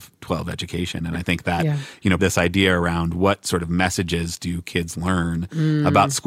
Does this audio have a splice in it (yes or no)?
yes